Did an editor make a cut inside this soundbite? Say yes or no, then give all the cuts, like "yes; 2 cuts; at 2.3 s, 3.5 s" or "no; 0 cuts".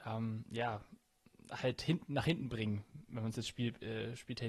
no; 0 cuts